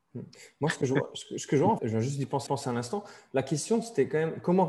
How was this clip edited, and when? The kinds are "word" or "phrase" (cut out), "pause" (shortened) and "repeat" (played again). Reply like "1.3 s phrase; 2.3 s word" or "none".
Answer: 1.8 s word; 2.5 s repeat

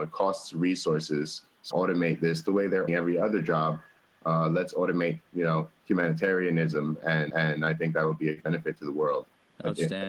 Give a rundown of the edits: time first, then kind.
1.7 s phrase; 2.9 s word; 7.3 s repeat; 8.4 s word

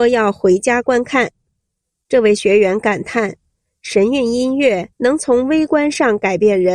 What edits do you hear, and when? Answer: 4.9 s pause

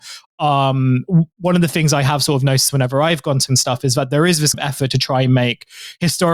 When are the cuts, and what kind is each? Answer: 3.5 s word; 4.5 s word

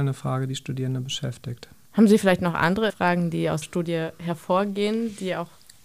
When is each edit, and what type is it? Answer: 1.9 s pause; 2.9 s word; 3.6 s word

